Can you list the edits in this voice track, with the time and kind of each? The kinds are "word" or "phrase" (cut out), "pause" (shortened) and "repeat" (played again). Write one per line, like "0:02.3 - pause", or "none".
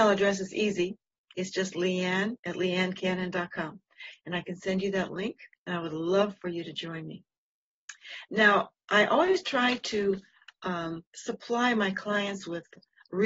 0:01.2 - pause
0:02.4 - pause
0:05.5 - pause
0:11.1 - pause